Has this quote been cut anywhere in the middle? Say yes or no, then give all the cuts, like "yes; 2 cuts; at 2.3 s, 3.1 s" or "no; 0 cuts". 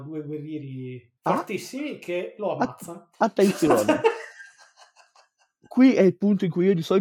yes; 2 cuts; at 1.2 s, 3.2 s